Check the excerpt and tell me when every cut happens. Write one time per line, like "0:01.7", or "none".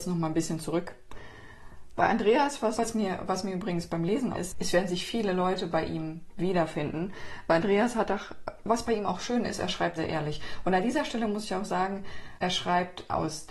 0:02.7
0:04.3
0:09.9